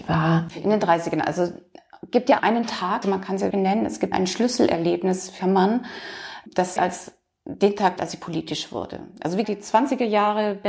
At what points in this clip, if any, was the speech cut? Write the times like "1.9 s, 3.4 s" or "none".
2.4 s, 3.0 s, 3.5 s, 4.1 s, 5.4 s, 6.8 s, 8.0 s, 9.4 s